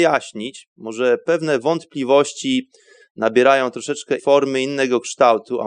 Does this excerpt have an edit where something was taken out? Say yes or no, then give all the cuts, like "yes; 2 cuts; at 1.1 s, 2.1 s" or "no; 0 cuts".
yes; 1 cut; at 4.2 s